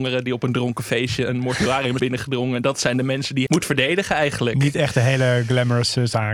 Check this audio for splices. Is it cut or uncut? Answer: cut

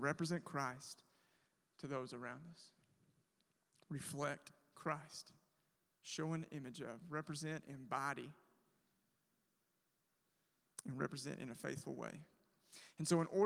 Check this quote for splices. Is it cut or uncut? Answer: uncut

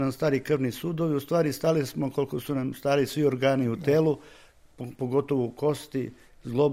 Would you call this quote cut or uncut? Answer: uncut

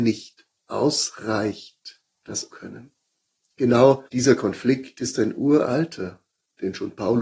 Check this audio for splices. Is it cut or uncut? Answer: cut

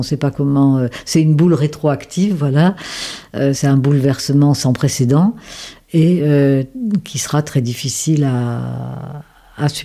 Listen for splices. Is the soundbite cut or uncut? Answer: uncut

